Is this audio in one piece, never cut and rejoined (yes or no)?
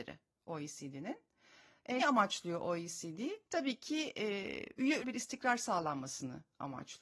no